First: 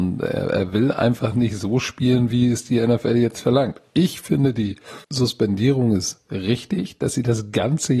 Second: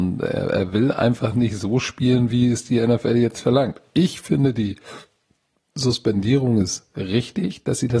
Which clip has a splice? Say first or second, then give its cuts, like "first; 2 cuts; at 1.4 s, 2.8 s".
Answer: first; 1 cut; at 5.0 s